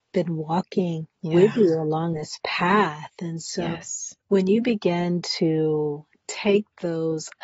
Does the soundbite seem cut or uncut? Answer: cut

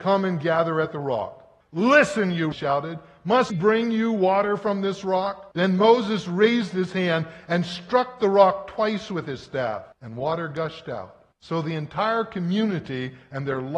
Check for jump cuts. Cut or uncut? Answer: cut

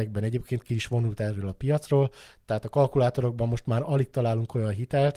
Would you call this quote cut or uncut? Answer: uncut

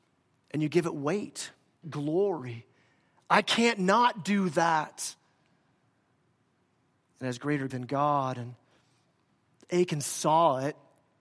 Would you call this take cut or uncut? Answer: cut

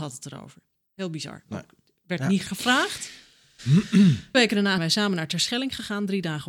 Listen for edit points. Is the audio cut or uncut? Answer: cut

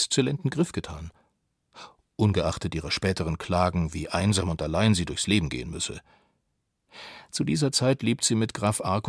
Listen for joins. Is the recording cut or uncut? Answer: uncut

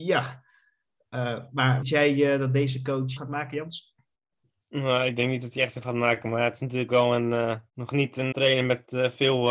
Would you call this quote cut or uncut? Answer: cut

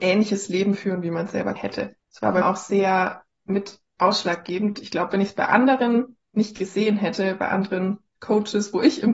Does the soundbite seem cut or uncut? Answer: cut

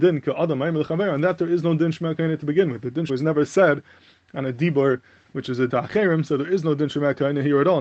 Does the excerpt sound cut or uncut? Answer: cut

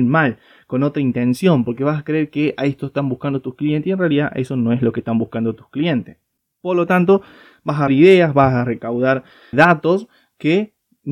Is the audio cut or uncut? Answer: cut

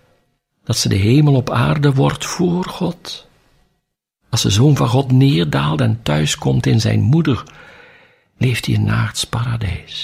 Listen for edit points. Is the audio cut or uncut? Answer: uncut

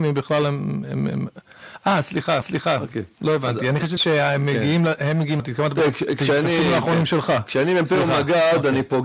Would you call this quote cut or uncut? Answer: cut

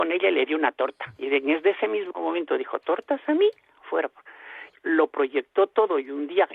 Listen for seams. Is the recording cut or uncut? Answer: cut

